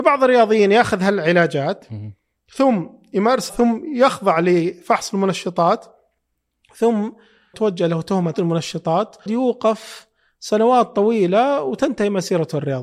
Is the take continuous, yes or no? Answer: no